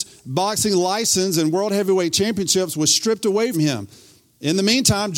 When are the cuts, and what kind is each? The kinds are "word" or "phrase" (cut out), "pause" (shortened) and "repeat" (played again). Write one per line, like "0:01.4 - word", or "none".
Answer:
0:03.5 - word